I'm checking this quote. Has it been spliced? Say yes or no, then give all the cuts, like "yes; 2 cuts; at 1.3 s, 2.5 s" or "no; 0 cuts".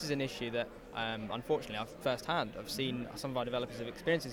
yes; 1 cut; at 2.0 s